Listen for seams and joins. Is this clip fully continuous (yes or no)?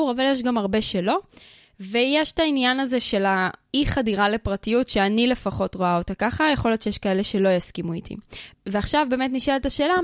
yes